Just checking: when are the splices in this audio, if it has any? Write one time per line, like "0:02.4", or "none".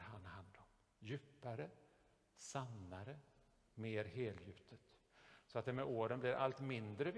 none